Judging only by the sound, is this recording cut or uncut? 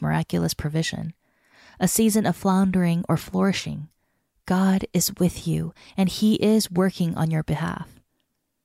uncut